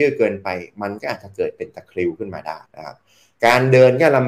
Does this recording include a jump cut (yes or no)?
yes